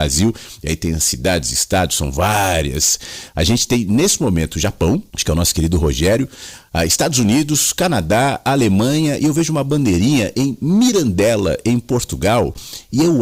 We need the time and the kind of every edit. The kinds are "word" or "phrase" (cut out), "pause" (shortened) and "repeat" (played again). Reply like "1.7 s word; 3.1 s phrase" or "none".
5.1 s pause